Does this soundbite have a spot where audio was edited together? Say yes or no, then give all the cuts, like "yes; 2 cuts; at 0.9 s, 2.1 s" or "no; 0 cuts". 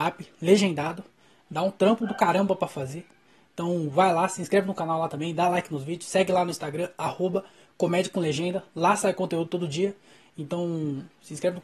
no; 0 cuts